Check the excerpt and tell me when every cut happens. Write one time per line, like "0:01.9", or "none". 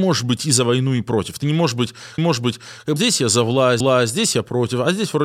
0:02.2
0:03.0
0:03.8